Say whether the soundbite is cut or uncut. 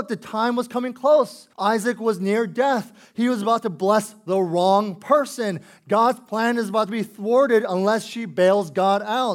cut